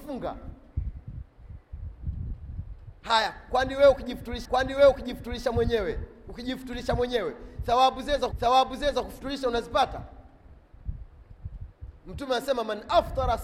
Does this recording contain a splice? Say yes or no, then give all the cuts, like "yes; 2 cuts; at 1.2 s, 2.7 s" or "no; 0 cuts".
yes; 2 cuts; at 4.4 s, 8.3 s